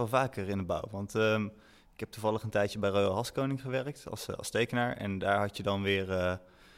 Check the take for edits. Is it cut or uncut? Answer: uncut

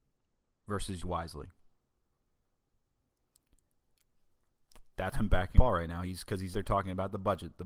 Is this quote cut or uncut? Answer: cut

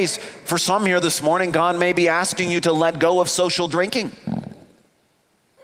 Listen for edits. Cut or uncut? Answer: uncut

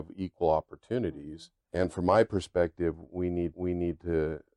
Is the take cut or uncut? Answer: cut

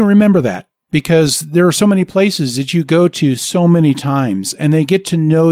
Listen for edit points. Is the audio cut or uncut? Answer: uncut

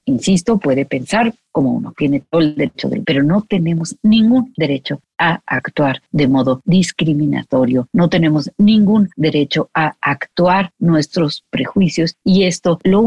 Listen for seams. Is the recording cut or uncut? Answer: cut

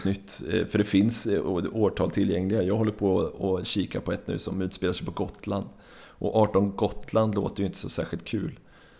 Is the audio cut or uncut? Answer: uncut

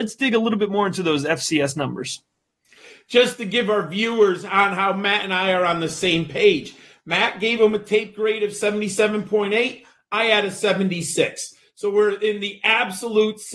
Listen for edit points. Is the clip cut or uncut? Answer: uncut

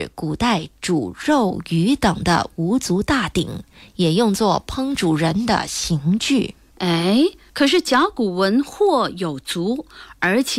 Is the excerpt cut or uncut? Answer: uncut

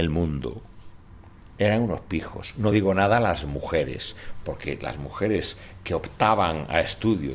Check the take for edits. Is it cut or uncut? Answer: uncut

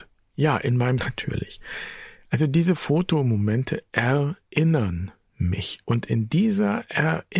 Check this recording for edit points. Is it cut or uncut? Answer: cut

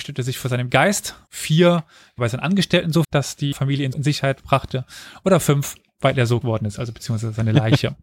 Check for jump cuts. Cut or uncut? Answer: cut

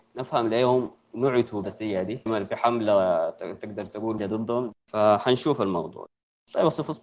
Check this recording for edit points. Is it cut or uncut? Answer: cut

